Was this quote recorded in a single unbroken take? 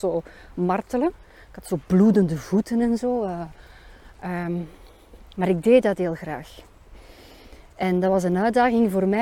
yes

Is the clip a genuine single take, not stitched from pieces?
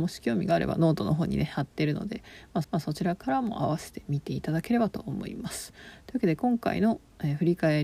no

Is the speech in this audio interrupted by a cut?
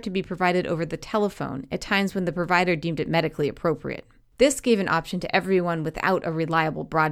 no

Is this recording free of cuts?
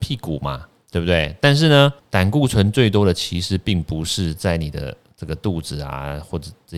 no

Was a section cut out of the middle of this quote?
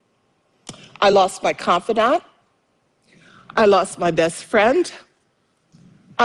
no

